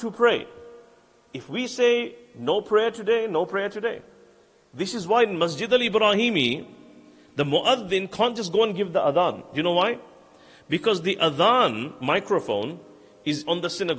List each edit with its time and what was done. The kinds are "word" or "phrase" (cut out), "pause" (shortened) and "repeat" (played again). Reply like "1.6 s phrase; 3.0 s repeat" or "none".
none